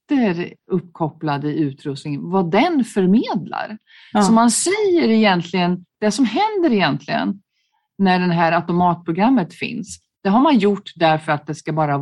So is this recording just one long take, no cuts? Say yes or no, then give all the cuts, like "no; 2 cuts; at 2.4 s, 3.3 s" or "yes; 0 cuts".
yes; 0 cuts